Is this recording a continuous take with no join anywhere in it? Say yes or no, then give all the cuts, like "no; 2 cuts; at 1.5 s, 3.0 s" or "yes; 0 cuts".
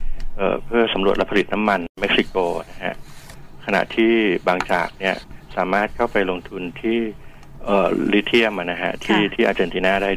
no; 1 cut; at 1.9 s